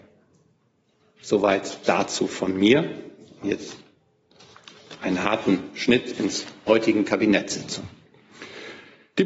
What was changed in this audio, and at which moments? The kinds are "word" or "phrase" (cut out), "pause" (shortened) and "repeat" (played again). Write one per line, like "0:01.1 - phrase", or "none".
0:06.7 - word